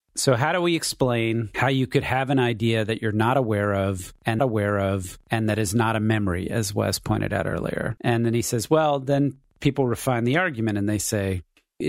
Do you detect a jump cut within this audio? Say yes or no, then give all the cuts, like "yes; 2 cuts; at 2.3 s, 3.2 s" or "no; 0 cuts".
yes; 1 cut; at 4.4 s